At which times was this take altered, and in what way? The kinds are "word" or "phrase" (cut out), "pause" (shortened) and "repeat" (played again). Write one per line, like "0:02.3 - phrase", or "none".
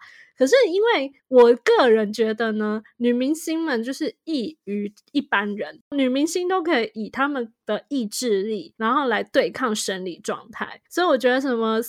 0:10.9 - pause

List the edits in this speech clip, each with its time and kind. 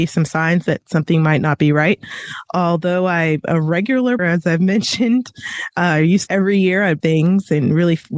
0:04.2 - word
0:06.3 - phrase
0:07.0 - word

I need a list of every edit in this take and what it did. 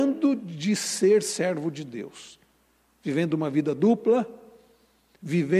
none

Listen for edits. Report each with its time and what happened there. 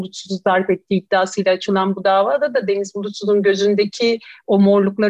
none

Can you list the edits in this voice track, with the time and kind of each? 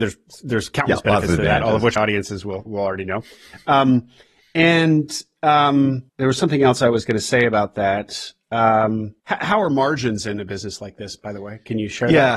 0:02.0 - word
0:02.7 - word
0:06.1 - pause
0:09.2 - pause

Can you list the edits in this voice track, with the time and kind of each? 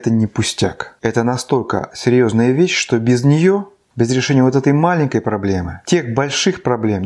none

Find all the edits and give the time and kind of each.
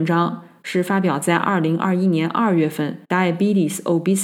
0:03.0 - pause

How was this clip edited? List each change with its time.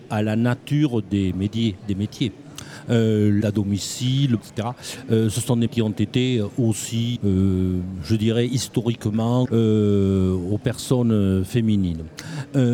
0:03.4 - word
0:04.4 - word
0:05.7 - word
0:07.2 - word
0:09.5 - word

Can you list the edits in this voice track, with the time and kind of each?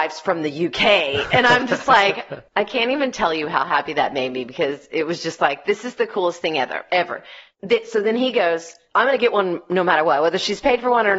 none

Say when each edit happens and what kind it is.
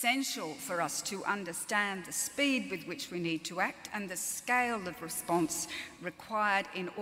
none

